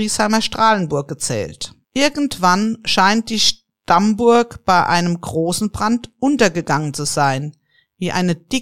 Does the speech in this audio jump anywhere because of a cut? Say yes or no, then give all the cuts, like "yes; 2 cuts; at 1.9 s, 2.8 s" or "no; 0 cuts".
yes; 1 cut; at 1.8 s